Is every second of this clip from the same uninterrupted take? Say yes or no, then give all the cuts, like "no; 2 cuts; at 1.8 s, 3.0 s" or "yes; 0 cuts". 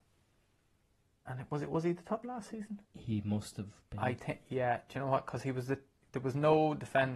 no; 3 cuts; at 2.2 s, 2.8 s, 6.0 s